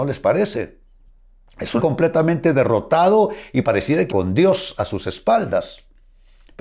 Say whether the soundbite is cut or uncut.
cut